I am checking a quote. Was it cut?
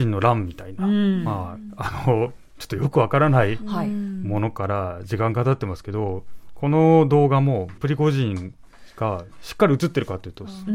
yes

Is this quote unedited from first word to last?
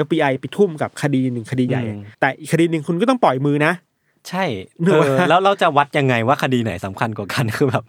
no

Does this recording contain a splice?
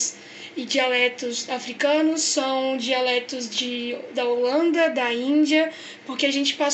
no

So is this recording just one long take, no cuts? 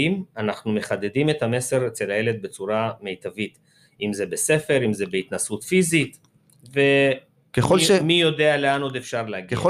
yes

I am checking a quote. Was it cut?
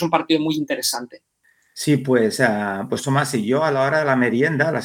no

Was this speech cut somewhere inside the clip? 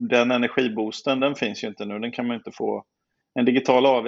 no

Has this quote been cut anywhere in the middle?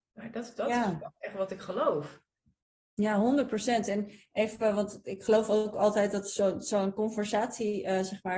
no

